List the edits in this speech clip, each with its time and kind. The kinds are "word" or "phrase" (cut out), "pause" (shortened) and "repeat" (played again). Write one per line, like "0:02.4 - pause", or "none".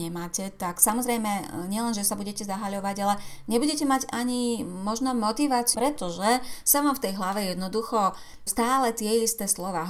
0:05.7 - phrase
0:08.5 - word